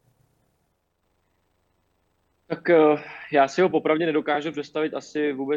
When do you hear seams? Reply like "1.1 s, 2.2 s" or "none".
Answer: none

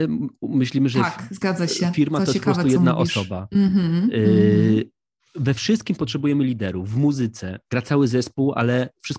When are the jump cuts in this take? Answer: none

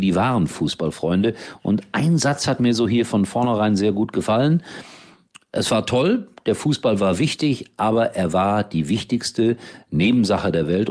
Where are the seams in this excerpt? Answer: none

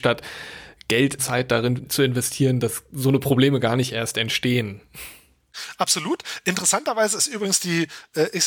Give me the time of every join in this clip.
1.2 s, 1.8 s

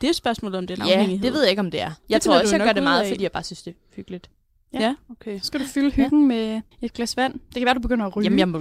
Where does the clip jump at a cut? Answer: 2.0 s, 6.7 s

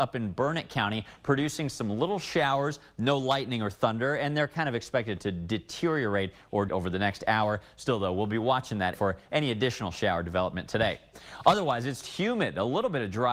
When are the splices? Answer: 6.7 s, 8.9 s, 12.0 s

